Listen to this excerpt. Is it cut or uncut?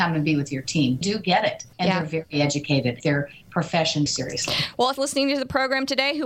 cut